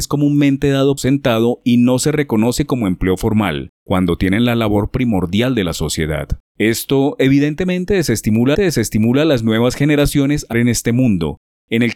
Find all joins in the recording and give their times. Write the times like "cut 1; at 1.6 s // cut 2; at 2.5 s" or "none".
cut 1; at 1.0 s // cut 2; at 6.5 s // cut 3; at 8.5 s // cut 4; at 10.5 s